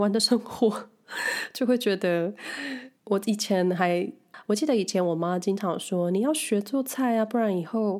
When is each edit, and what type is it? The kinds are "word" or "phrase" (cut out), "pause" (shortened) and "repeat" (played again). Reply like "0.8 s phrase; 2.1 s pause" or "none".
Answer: 3.0 s pause